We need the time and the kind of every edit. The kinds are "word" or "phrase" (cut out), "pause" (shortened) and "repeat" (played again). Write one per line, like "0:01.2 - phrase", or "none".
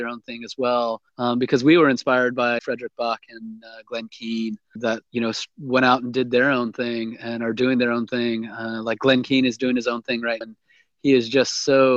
0:01.1 - pause
0:02.6 - phrase
0:04.8 - word
0:05.1 - pause
0:10.4 - word